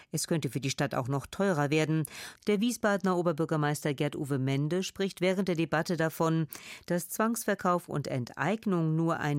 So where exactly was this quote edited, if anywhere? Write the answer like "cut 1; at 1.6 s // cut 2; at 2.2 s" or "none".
none